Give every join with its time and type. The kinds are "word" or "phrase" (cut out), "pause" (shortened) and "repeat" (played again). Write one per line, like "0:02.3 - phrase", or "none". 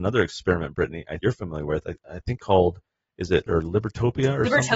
0:01.2 - word
0:02.4 - word
0:03.5 - word